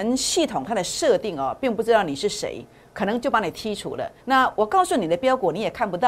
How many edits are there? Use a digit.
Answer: 1